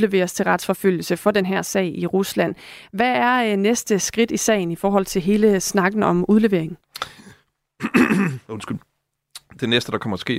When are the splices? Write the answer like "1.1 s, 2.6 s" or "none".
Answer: none